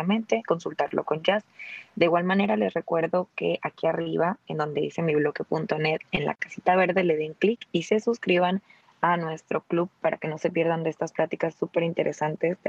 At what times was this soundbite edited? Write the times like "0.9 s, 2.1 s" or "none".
none